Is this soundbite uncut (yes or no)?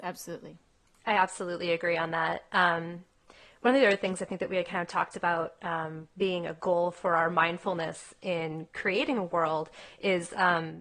yes